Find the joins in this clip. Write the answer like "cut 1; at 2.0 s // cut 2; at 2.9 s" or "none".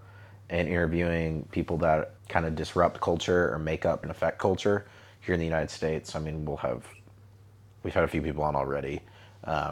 cut 1; at 2.2 s // cut 2; at 4.0 s

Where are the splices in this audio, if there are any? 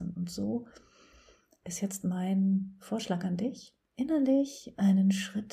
cut 1; at 3.9 s

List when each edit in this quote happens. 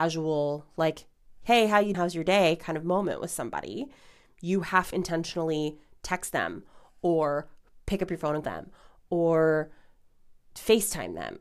cut 1; at 1.9 s // cut 2; at 4.9 s // cut 3; at 8.4 s

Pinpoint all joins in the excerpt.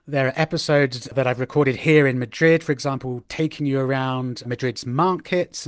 cut 1; at 4.4 s

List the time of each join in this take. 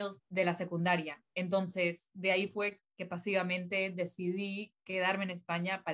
none

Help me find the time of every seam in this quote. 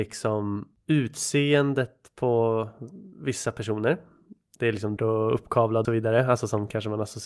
cut 1; at 3.1 s // cut 2; at 5.0 s // cut 3; at 5.8 s

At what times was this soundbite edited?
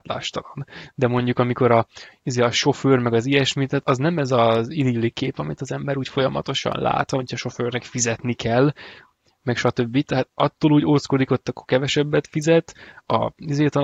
cut 1; at 3.8 s

